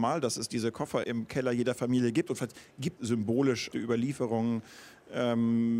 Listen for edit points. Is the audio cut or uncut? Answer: cut